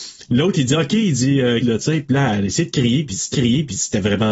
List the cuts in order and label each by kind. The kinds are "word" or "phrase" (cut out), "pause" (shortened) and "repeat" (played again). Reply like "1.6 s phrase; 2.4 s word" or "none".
1.6 s word; 3.3 s repeat